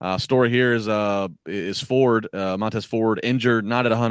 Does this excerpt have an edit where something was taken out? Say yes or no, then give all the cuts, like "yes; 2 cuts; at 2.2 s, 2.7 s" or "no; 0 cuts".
no; 0 cuts